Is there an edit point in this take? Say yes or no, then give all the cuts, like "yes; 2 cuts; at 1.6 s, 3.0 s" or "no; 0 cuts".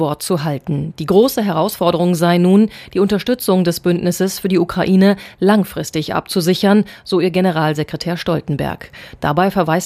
no; 0 cuts